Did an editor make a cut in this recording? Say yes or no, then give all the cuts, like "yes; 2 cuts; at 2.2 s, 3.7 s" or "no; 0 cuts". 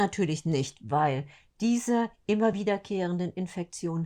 no; 0 cuts